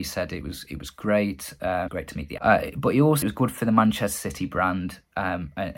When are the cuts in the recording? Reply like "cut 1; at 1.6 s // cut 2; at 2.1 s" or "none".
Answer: cut 1; at 1.9 s // cut 2; at 2.4 s // cut 3; at 3.2 s

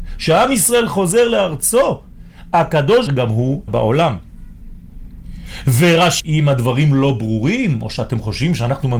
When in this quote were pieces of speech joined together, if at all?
cut 1; at 3.1 s // cut 2; at 3.7 s // cut 3; at 6.2 s

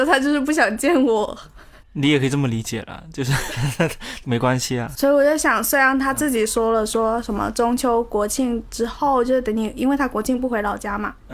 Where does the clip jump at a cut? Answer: cut 1; at 1.8 s // cut 2; at 4.2 s

